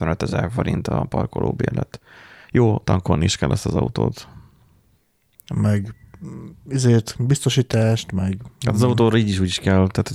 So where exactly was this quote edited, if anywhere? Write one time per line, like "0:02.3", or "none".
none